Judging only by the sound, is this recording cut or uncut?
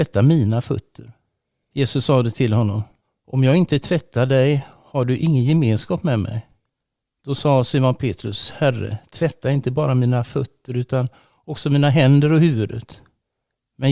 uncut